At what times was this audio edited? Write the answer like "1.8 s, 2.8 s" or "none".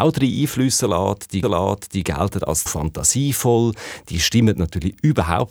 1.4 s, 2.7 s